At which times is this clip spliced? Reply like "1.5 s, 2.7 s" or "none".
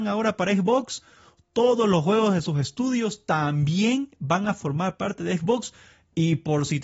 none